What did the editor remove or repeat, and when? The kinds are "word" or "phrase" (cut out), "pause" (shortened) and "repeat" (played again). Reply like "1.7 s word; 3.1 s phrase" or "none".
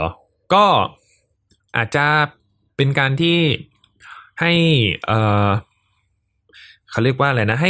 none